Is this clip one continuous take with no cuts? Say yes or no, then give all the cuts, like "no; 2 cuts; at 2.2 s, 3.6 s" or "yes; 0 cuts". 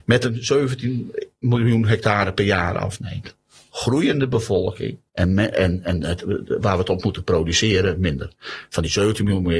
no; 1 cut; at 5.1 s